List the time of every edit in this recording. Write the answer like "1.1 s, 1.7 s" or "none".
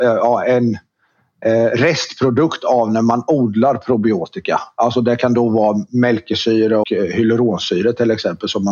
6.8 s